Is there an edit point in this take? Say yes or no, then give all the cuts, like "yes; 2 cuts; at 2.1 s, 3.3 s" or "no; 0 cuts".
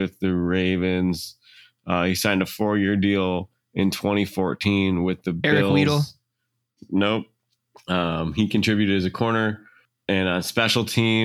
no; 0 cuts